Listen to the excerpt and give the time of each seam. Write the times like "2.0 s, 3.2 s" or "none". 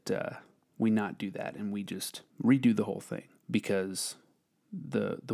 2.3 s, 3.4 s